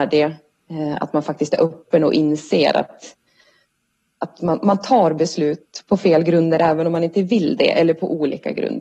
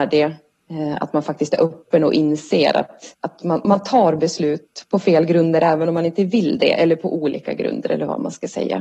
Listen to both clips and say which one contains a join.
second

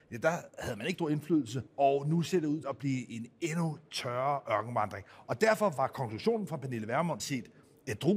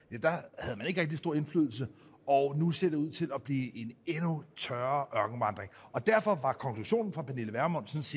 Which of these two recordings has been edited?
first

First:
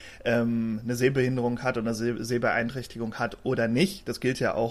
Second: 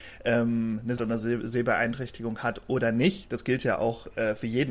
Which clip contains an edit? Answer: second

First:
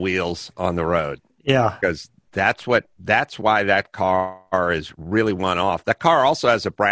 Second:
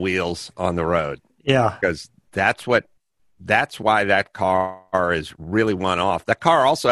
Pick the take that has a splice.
first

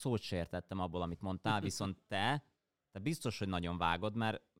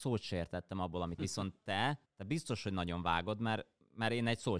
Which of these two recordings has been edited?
second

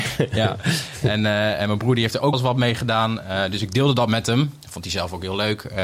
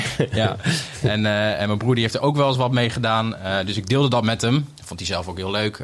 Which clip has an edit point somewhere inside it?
first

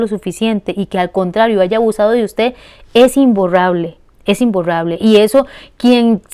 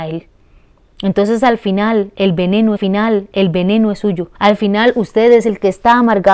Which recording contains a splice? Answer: second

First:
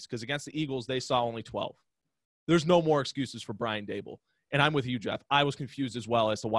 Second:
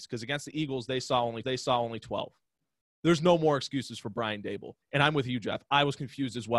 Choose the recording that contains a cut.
second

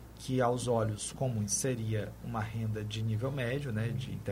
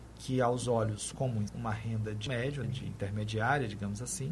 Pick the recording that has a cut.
second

